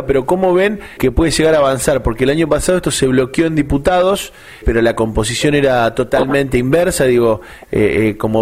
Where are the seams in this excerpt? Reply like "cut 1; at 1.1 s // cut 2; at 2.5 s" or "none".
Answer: cut 1; at 1.0 s // cut 2; at 4.6 s